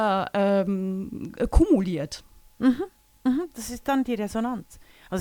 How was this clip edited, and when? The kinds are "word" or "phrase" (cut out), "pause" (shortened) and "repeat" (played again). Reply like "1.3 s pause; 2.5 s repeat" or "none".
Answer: none